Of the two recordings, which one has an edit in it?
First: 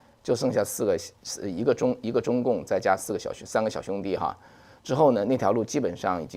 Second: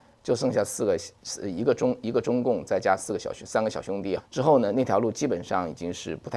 second; 1 cut; at 4.2 s

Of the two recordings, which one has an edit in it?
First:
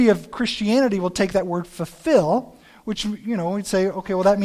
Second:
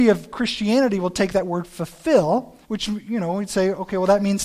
second; 1 cut; at 2.6 s

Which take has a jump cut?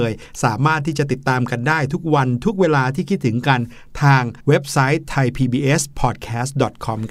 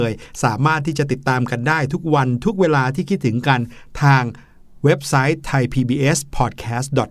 first; 1 cut; at 4.4 s

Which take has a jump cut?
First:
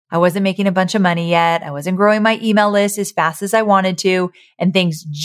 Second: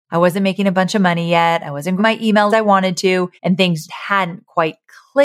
second; 4 cuts; at 2.0 s, 2.5 s, 3.4 s, 3.9 s

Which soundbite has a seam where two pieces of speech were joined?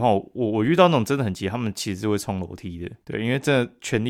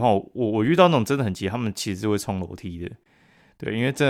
first; 1 cut; at 3.0 s

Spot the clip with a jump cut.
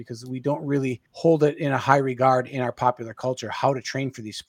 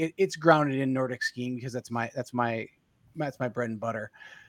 first; 1 cut; at 1.1 s

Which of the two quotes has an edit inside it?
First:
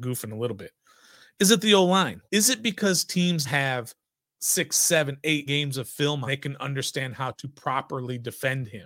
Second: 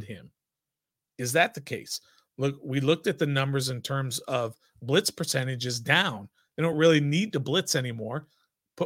first; 5 cuts; at 2.3 s, 3.4 s, 4.2 s, 5.5 s, 6.3 s

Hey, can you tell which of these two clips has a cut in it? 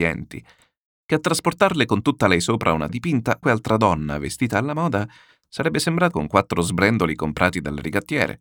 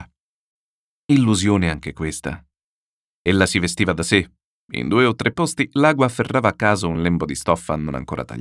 first; 3 cuts; at 2.9 s, 3.4 s, 6.1 s

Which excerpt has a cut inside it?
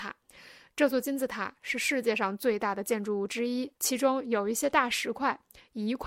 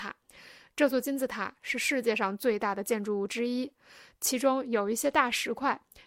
first; 1 cut; at 3.8 s

